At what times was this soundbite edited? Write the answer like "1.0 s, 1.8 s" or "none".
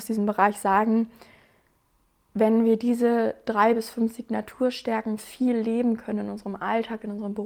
none

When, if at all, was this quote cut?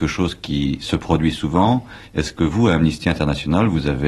2.0 s

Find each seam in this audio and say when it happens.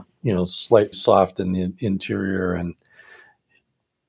0.9 s

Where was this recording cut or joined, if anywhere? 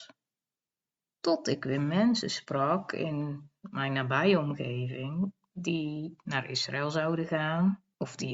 none

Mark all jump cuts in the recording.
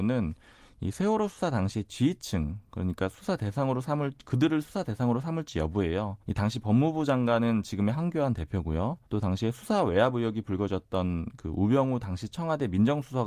6.2 s, 7.9 s, 9.1 s

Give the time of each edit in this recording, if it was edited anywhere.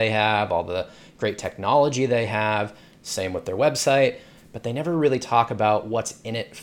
none

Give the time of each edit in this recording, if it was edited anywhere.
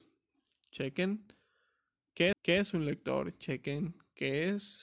2.3 s

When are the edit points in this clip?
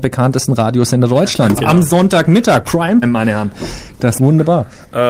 1.6 s, 3.0 s, 4.2 s

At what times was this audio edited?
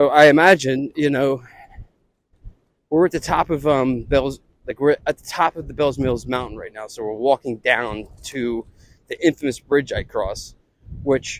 none

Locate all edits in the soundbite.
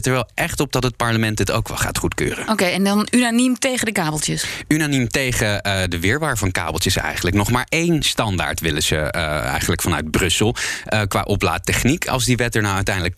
none

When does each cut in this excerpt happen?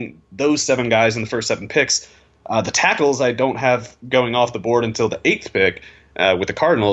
none

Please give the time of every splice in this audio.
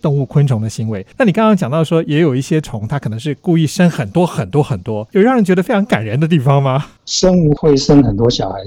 1.1 s, 5.1 s, 7.0 s

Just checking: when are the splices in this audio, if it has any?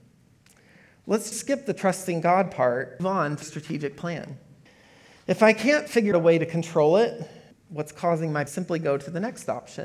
1.3 s, 3.0 s, 3.4 s, 4.7 s, 6.1 s, 7.5 s, 8.5 s

